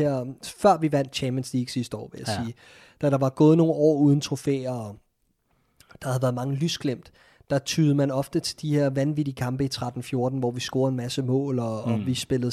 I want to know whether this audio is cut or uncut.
uncut